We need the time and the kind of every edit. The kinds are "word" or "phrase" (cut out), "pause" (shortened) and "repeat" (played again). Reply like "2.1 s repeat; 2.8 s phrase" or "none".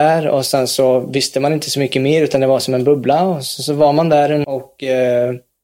4.4 s phrase